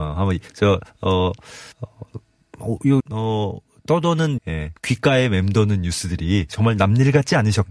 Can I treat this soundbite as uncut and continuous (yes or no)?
no